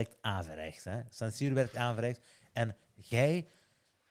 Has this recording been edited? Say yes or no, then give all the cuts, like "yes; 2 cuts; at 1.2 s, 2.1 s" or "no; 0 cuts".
no; 0 cuts